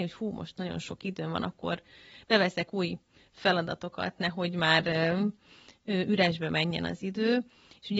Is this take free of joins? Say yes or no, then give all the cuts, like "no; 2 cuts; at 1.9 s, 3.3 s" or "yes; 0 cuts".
yes; 0 cuts